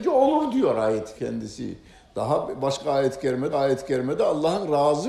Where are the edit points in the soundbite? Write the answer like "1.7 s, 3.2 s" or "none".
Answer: 1.2 s, 3.5 s